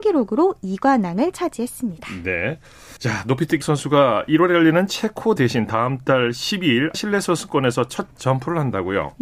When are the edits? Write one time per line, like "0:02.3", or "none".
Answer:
0:03.0
0:03.6
0:05.4
0:06.9